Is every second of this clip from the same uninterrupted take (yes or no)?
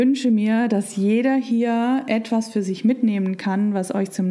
yes